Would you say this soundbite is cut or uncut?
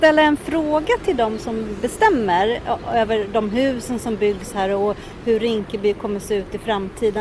uncut